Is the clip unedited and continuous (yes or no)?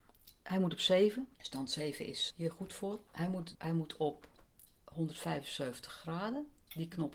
no